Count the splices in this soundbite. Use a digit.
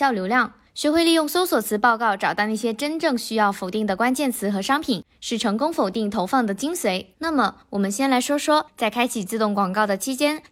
1